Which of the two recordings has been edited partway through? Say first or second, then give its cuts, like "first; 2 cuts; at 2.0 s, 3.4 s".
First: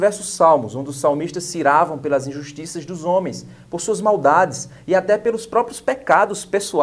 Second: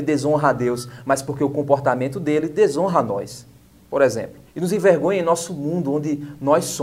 second; 1 cut; at 4.4 s